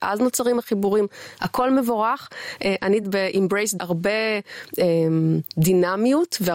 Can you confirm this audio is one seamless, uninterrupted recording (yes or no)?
no